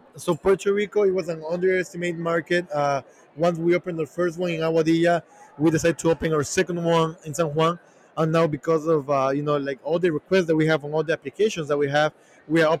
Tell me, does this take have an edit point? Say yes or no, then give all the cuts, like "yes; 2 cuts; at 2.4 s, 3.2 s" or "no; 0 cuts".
no; 0 cuts